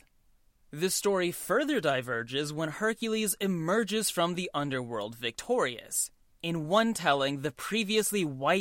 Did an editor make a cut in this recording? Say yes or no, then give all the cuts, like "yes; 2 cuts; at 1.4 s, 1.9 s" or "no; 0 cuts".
no; 0 cuts